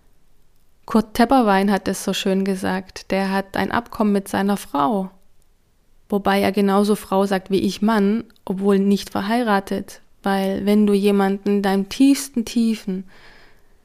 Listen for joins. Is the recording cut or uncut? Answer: uncut